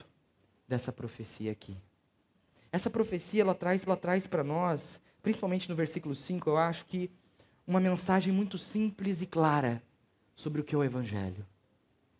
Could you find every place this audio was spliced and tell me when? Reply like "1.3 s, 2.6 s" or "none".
3.9 s